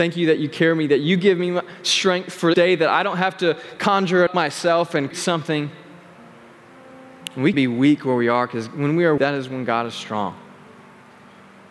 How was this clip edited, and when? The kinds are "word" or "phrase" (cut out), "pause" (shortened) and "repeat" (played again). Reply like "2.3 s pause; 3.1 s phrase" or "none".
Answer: 2.5 s word; 4.3 s word; 5.1 s word; 7.5 s word; 9.2 s word

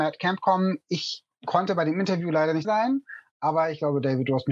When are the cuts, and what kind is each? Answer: 2.6 s word

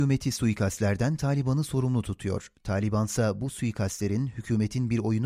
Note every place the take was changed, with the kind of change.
none

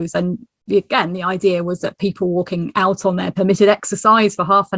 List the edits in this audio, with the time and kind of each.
none

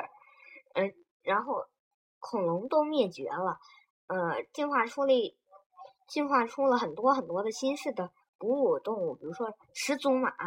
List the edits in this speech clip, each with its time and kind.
none

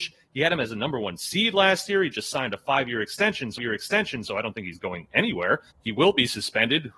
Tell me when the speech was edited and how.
3.6 s repeat; 5.7 s pause

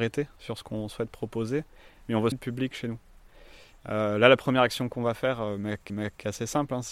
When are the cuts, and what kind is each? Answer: 2.3 s phrase; 5.9 s repeat

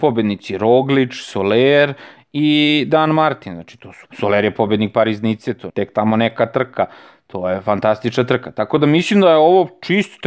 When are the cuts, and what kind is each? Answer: 4.0 s word; 5.7 s word

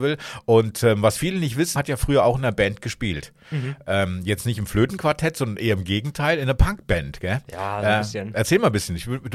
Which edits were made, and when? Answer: 1.8 s word

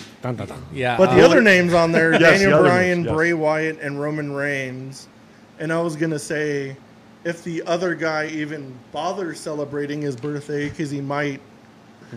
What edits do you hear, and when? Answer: none

